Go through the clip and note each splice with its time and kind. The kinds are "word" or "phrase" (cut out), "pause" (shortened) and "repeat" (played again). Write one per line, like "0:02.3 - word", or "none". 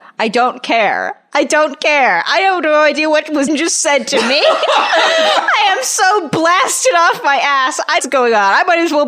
0:03.5 - word
0:08.0 - phrase